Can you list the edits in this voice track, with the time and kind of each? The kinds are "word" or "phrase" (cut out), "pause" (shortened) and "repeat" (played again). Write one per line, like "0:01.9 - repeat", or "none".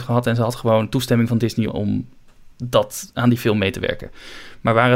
0:01.7 - word
0:02.5 - pause